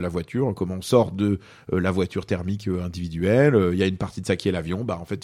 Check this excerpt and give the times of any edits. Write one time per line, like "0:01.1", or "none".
none